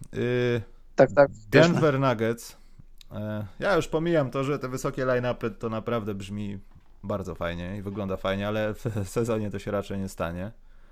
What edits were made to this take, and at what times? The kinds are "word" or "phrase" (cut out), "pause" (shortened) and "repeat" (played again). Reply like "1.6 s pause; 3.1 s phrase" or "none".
none